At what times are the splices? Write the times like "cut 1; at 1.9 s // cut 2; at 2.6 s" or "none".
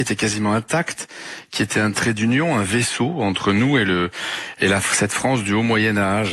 none